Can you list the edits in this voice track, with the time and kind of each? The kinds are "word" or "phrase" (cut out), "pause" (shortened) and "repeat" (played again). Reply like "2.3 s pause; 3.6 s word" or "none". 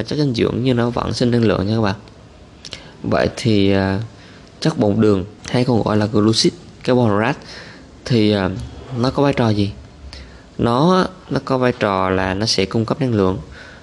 5.4 s pause